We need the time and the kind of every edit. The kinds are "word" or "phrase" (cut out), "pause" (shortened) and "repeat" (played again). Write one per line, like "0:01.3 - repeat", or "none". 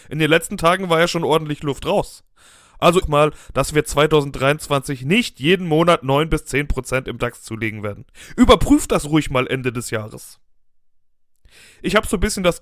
0:03.0 - phrase

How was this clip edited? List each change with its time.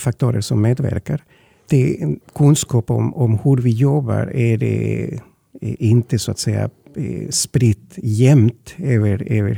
none

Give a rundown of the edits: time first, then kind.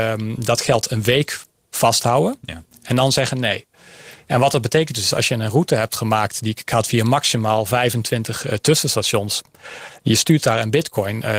none

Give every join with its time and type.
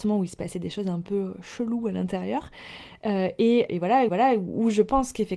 0:03.7 - word
0:04.1 - repeat

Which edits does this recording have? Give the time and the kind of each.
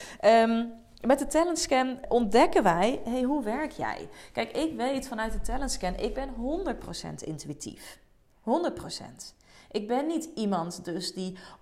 0:02.0 - word

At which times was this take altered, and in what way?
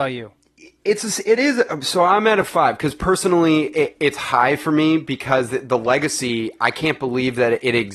none

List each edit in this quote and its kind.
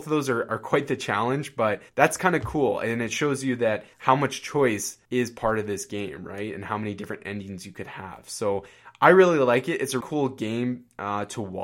0:01.9 - pause
0:03.9 - pause
0:05.1 - pause
0:10.0 - word

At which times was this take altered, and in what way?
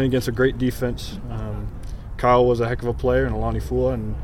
none

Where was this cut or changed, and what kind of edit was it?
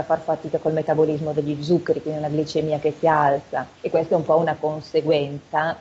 0:03.8 - pause

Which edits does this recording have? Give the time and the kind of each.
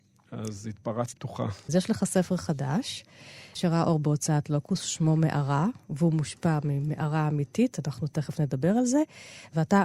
0:01.1 - word

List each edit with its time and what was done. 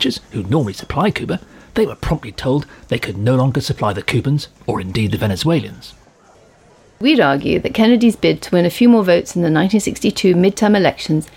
none

